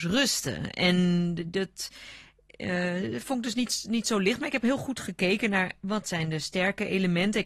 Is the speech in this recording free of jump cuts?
yes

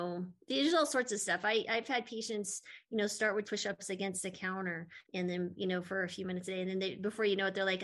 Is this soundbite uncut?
no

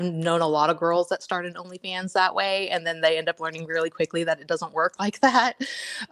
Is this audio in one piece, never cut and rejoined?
yes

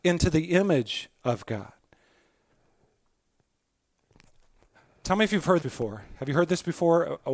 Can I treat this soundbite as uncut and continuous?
no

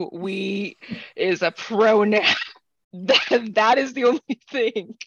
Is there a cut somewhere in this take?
no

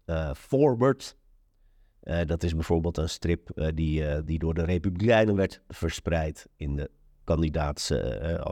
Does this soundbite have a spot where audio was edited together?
no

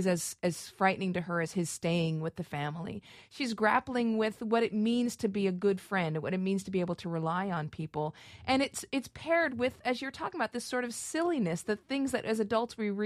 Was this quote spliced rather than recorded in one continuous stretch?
no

